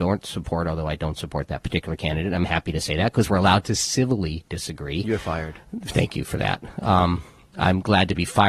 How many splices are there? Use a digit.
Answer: 0